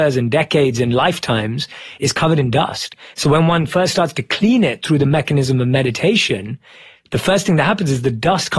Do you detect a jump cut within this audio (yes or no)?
no